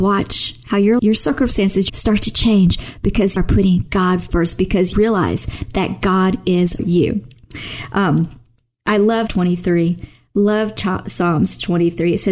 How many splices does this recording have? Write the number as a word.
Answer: six